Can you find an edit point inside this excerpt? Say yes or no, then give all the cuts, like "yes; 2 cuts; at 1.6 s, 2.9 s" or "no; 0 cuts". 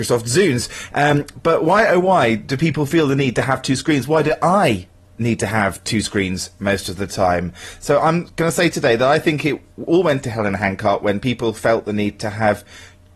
no; 0 cuts